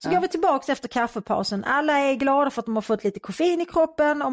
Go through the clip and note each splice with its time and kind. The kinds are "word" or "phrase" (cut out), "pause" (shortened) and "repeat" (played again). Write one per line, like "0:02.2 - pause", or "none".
none